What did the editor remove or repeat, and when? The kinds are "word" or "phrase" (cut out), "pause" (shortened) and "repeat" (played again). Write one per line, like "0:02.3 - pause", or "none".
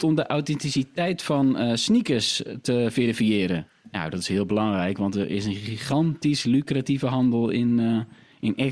none